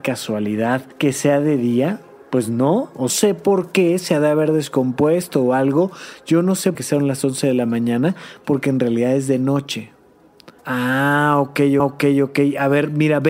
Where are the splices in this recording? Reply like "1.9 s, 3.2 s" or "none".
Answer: 0.9 s, 2.2 s, 3.1 s, 6.7 s, 10.6 s, 11.8 s